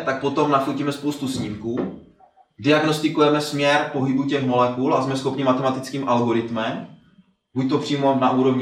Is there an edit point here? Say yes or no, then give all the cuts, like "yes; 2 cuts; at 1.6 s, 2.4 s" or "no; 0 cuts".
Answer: no; 0 cuts